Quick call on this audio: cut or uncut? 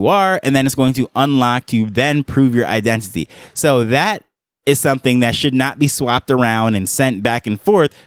uncut